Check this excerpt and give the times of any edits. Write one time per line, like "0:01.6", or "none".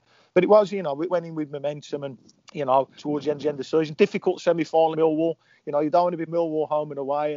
0:01.1
0:02.3
0:03.0
0:03.4
0:04.9
0:06.3